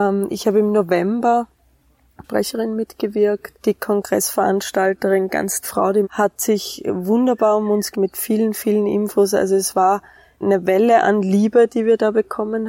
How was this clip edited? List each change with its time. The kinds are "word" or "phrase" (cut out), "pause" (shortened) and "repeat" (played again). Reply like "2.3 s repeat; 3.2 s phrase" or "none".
2.2 s phrase; 3.6 s pause; 5.6 s word; 6.0 s word; 7.9 s word; 10.4 s word